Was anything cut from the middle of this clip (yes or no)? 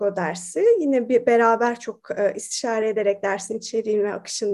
no